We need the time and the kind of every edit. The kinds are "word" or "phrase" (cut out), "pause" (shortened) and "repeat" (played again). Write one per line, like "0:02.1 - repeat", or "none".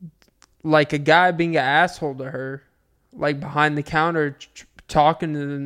none